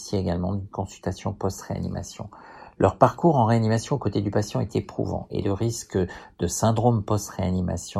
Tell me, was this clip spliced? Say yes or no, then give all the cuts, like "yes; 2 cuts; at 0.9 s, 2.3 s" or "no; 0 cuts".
no; 0 cuts